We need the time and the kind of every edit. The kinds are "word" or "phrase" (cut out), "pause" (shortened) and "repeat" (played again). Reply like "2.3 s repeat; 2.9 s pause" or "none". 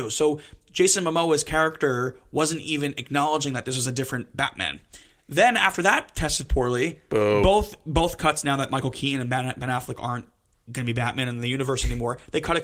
none